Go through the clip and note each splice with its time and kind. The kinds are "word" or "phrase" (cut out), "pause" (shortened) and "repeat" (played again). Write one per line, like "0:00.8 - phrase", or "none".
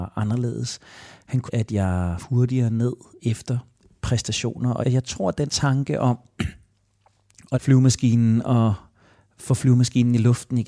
0:01.5 - word
0:02.2 - word
0:03.2 - word
0:04.8 - word
0:05.5 - word
0:07.5 - word